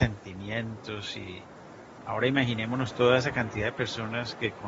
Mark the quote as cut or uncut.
uncut